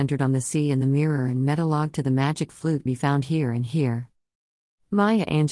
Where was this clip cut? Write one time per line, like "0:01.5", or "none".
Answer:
0:02.9

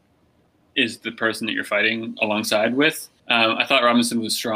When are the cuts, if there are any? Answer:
0:02.2
0:03.2

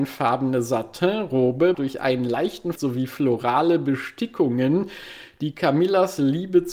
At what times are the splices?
0:01.7
0:02.7

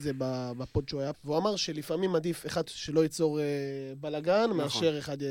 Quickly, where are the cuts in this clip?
0:01.1
0:02.7

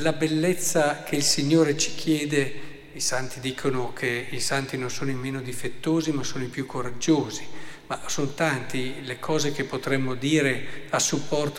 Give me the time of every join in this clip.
none

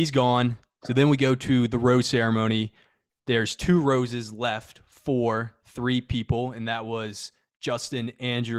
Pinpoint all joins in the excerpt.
none

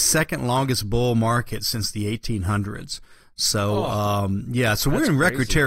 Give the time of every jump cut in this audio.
none

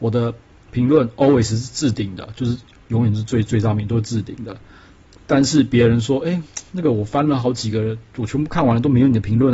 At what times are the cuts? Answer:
none

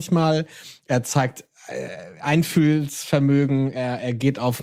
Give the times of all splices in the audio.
none

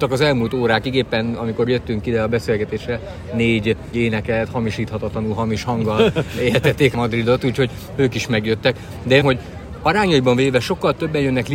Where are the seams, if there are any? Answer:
0:03.9
0:06.9
0:09.2

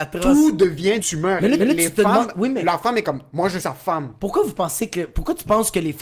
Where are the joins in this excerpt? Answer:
0:01.0
0:01.6
0:03.6

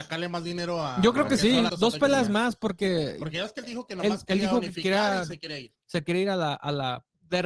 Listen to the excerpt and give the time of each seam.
0:01.7

